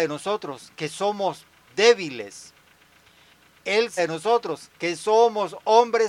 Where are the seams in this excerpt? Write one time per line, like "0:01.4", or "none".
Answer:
0:01.7
0:04.0

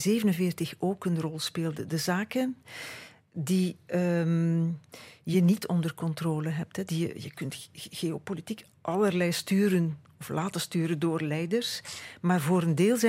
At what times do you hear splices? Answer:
none

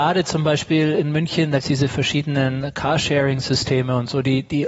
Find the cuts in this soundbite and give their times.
0:01.6

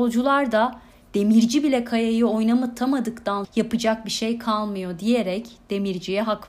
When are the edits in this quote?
0:03.4

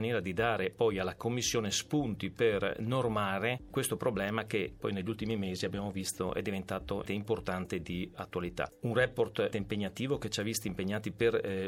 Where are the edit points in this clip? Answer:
0:07.1
0:09.5

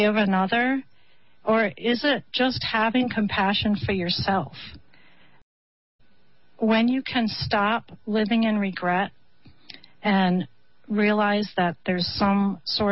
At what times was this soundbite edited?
none

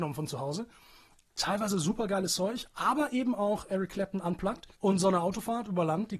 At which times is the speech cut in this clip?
0:04.7

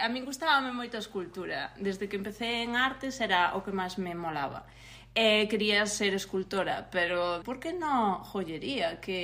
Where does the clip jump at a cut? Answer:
0:07.4

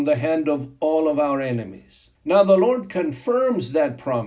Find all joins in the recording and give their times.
0:02.1

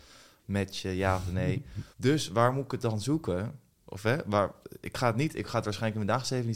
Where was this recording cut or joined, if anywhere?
0:01.9

